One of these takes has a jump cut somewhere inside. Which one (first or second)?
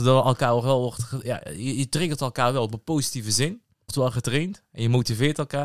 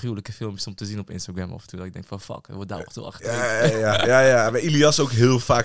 first